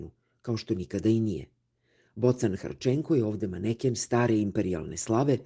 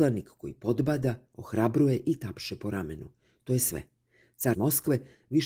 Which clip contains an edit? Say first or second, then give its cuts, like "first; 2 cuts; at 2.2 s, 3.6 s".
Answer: second; 1 cut; at 4.5 s